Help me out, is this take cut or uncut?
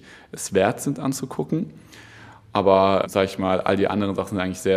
cut